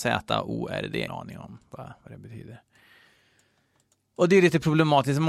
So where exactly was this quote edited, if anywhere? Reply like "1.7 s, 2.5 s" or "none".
1.1 s

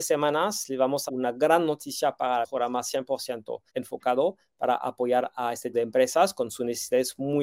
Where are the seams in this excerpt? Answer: 1.1 s, 2.4 s, 3.7 s, 5.7 s

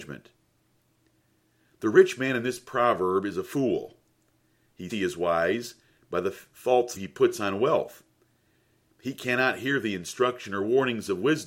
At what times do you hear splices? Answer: 4.9 s, 7.0 s

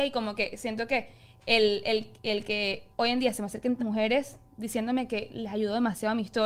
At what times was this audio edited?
2.9 s, 3.8 s

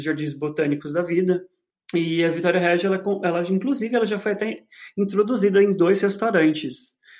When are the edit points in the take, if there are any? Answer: 1.7 s

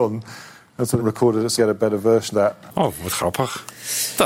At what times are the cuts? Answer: 1.0 s, 1.6 s, 2.3 s

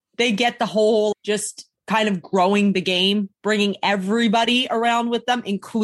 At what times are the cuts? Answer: 1.1 s, 3.3 s

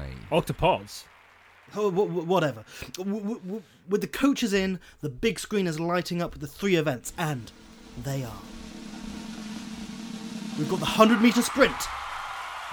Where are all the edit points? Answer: none

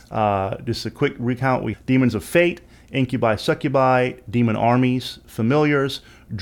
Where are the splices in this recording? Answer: 1.7 s

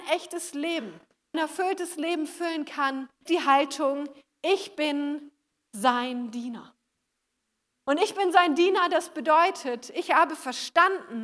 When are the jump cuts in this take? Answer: 1.3 s, 3.3 s

